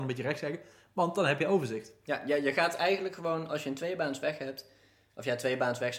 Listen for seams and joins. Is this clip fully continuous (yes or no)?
yes